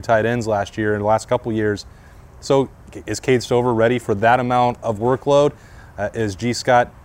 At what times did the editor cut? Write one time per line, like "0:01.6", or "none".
0:04.8